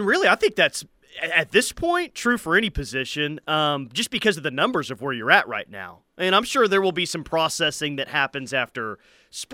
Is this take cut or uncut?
uncut